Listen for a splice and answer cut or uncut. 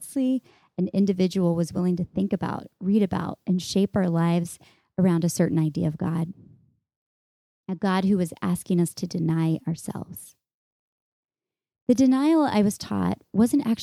uncut